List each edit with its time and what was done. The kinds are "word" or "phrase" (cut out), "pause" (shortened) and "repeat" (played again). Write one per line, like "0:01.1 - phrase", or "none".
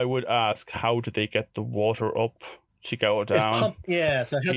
0:02.7 - pause